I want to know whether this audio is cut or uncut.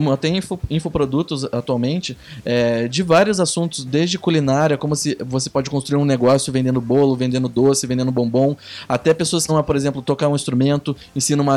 cut